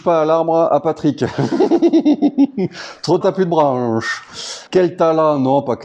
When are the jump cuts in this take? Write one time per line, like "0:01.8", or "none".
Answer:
0:03.2
0:04.7